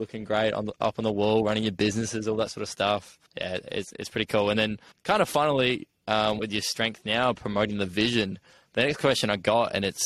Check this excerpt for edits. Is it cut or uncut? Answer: cut